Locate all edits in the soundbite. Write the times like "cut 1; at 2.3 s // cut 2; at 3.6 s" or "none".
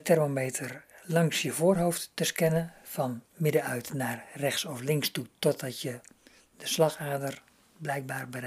none